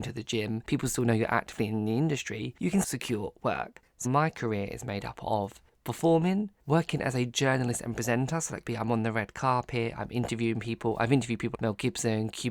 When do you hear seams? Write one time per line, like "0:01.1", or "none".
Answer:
0:02.8
0:04.0
0:08.6
0:11.5